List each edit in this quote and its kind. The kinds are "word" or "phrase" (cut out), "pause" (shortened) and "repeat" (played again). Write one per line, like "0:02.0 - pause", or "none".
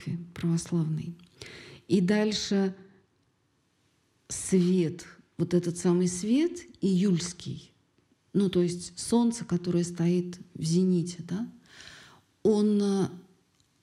none